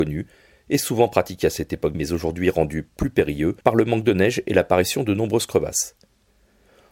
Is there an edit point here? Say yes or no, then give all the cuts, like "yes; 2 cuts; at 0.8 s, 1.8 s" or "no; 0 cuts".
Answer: yes; 2 cuts; at 1.9 s, 3.6 s